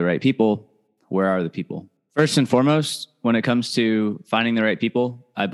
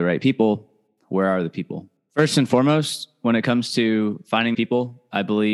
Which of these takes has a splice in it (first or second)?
second